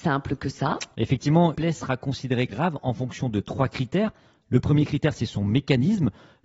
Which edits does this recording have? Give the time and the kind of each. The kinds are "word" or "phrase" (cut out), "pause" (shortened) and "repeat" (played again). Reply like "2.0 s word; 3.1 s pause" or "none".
1.5 s word; 2.5 s word